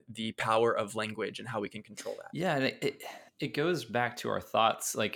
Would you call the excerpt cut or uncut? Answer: cut